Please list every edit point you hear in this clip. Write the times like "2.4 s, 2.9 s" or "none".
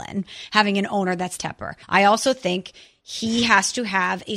1.4 s, 1.8 s